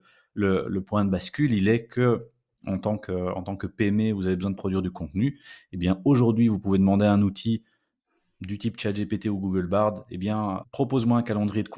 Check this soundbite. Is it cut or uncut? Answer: cut